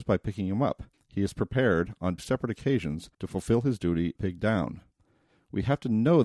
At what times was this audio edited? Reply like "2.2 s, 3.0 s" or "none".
0.9 s, 2.2 s, 3.1 s, 4.2 s